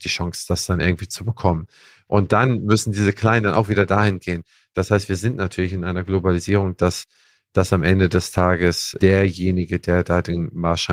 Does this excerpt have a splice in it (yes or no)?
no